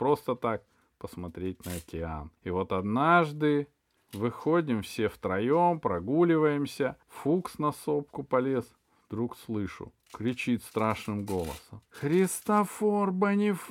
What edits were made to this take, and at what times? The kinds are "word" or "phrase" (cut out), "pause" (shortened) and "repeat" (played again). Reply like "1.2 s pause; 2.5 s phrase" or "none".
2.4 s pause; 7.0 s pause; 10.0 s pause; 11.9 s pause